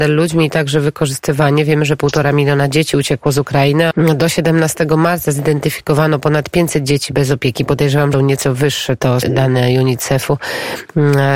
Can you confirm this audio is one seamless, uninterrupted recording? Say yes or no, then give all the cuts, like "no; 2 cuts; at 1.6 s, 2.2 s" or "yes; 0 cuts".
no; 3 cuts; at 3.9 s, 8.1 s, 9.2 s